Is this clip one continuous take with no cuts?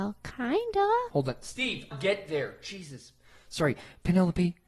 no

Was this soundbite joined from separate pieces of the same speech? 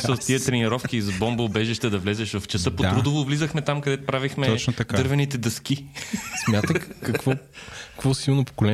no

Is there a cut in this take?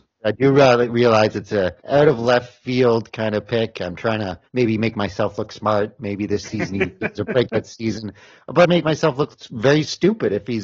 yes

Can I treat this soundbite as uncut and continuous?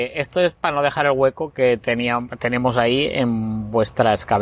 yes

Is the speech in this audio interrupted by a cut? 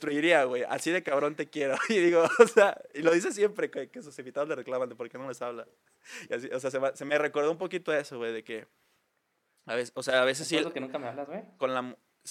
no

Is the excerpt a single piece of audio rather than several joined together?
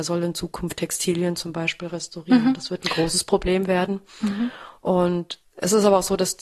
no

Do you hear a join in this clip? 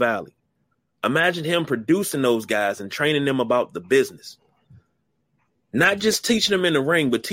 no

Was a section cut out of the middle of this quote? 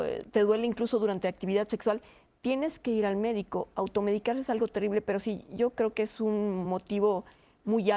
no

